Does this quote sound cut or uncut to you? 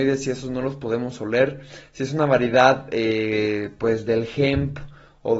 uncut